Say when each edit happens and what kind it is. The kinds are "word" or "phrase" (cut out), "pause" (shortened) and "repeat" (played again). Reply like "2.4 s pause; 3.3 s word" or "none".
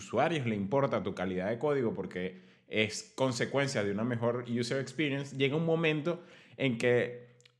none